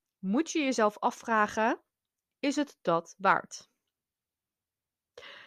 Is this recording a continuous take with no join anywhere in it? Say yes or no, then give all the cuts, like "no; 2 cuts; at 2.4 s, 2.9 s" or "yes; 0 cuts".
yes; 0 cuts